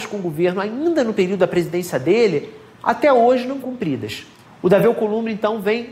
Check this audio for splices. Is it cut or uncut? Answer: cut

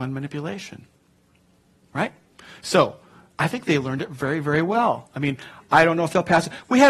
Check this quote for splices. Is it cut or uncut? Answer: uncut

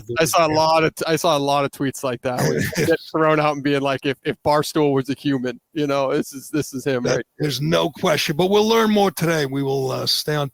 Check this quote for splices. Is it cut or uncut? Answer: uncut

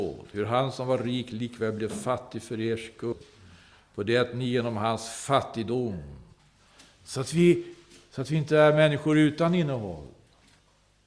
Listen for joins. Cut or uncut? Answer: uncut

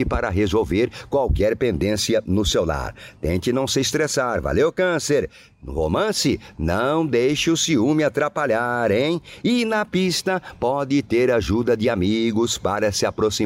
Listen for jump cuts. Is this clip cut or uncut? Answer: uncut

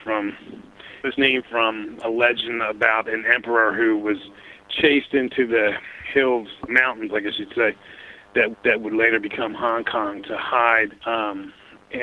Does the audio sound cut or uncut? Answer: cut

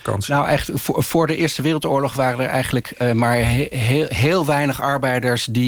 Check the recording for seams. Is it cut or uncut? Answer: uncut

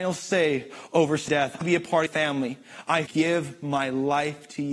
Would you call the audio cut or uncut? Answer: cut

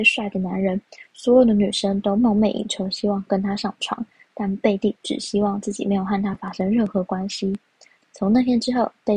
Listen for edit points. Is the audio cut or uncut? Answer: uncut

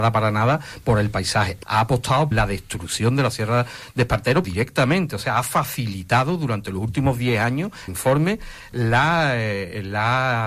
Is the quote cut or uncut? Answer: cut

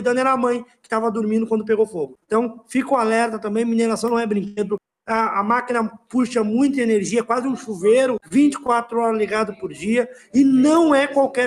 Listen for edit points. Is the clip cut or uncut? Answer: uncut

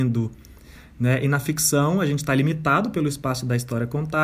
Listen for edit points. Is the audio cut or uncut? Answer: uncut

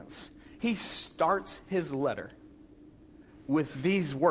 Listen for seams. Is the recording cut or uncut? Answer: uncut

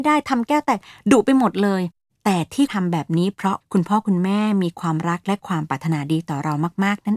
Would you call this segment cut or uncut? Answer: uncut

